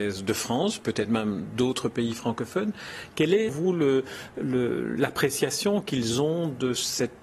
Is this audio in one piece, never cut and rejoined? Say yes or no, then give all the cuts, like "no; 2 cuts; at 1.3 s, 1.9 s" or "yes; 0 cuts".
no; 1 cut; at 3.5 s